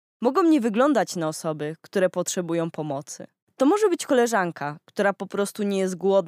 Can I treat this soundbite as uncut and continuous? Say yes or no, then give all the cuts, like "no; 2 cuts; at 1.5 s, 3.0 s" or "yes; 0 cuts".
no; 1 cut; at 3.4 s